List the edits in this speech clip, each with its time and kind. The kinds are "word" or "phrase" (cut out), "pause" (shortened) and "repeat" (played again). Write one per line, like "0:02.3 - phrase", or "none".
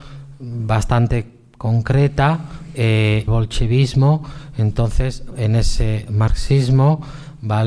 0:02.7 - word
0:03.3 - word
0:05.3 - word